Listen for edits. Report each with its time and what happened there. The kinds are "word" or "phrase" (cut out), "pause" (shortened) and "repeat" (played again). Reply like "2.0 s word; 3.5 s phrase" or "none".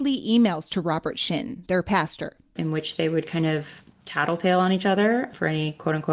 3.9 s pause